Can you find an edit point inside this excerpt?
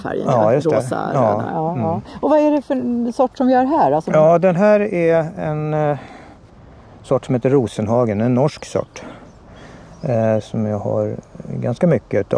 no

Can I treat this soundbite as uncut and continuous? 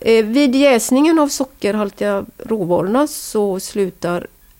yes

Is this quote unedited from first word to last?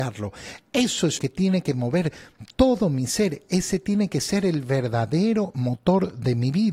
no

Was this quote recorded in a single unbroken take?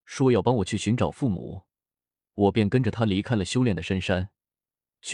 yes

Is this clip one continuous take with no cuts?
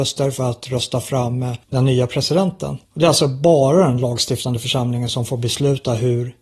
no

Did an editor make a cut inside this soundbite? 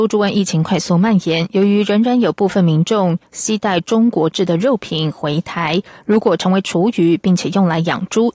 no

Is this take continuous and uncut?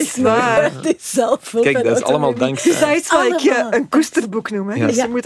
yes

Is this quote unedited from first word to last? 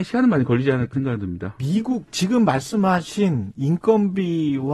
no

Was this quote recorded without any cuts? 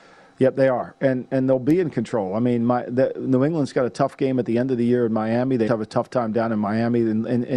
no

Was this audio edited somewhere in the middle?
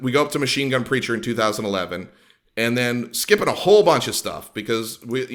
no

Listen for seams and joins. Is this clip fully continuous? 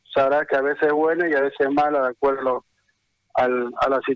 yes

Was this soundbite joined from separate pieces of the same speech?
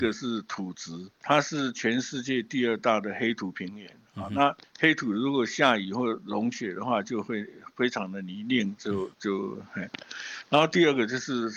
yes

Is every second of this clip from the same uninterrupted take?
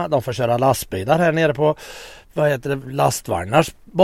yes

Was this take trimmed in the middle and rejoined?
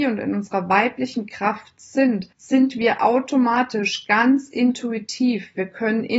yes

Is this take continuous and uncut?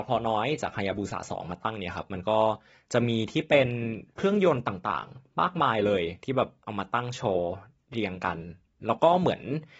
yes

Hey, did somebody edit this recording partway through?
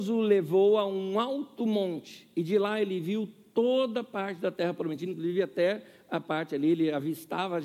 no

